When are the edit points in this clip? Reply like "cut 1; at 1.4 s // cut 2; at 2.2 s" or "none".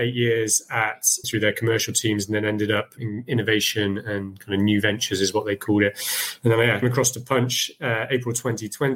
cut 1; at 1.2 s // cut 2; at 3.0 s // cut 3; at 6.8 s